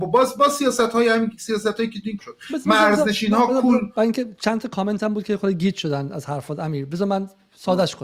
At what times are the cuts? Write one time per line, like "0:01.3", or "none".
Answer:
0:02.2

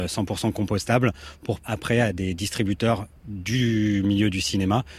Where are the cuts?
0:01.6

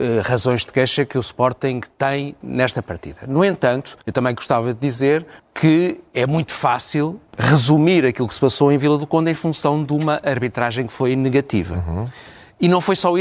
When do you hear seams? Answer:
0:02.4
0:04.0
0:05.4
0:07.3

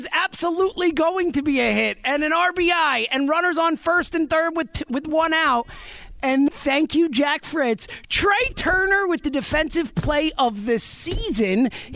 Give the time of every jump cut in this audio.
0:06.5

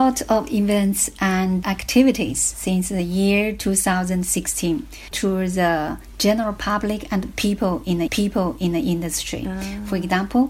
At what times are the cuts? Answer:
0:01.6
0:05.1
0:08.1

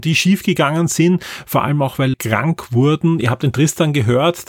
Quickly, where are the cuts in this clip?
0:02.1

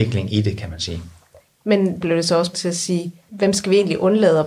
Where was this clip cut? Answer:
0:02.0
0:02.5
0:03.3

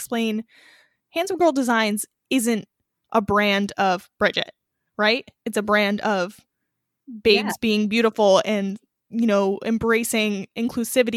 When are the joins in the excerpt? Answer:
none

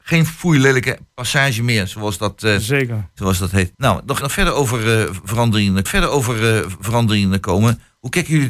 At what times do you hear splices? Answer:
0:03.7
0:04.2
0:05.9

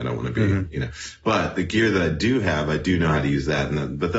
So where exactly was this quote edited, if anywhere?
none

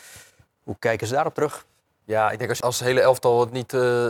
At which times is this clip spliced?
0:02.6

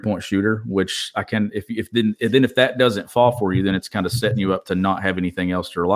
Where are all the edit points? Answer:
none

